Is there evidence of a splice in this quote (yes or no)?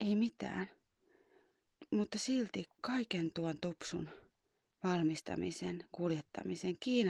no